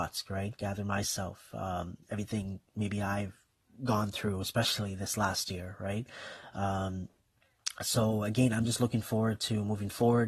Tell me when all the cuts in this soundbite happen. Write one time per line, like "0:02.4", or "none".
none

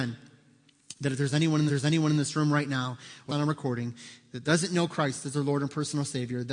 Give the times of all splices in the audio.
0:01.7
0:03.3

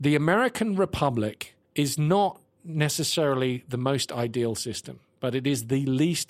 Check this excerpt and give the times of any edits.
0:01.7

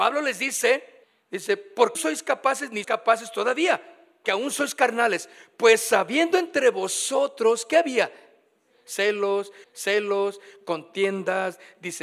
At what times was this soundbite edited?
0:01.0
0:01.9
0:02.8
0:04.2
0:09.6

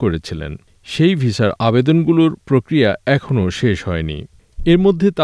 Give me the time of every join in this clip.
none

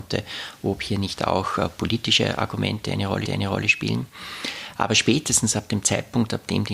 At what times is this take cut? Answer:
0:03.3

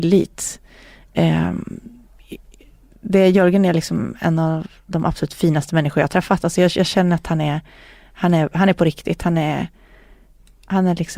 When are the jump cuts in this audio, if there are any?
none

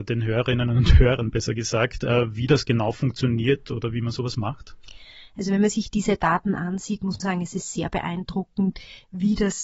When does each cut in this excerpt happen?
0:07.2

